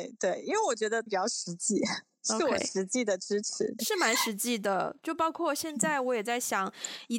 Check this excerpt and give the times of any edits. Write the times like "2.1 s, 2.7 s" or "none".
1.1 s, 3.8 s